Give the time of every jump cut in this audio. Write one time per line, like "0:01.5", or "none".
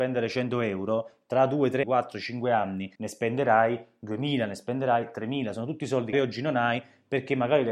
0:01.8
0:02.9
0:06.1